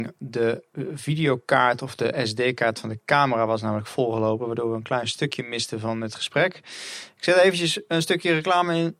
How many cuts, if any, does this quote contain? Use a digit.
0